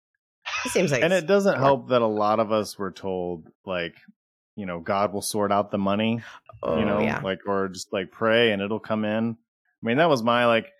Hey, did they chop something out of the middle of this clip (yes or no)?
no